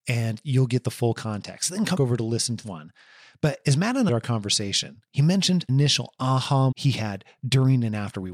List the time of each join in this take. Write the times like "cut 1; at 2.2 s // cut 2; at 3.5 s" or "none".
cut 1; at 1.9 s // cut 2; at 2.6 s // cut 3; at 4.1 s // cut 4; at 5.7 s // cut 5; at 6.7 s